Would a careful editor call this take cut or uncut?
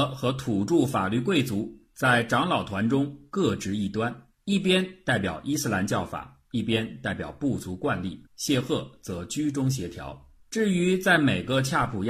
cut